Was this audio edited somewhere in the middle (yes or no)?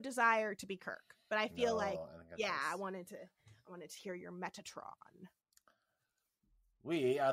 yes